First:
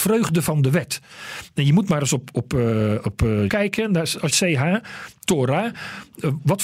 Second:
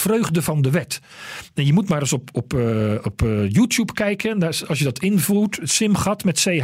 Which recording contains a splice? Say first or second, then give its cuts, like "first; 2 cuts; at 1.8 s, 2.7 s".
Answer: first; 2 cuts; at 3.5 s, 4.3 s